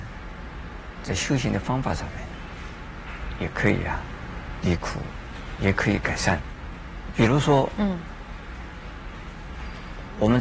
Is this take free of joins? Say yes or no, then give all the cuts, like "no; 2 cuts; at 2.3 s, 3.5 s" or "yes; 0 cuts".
no; 1 cut; at 4.6 s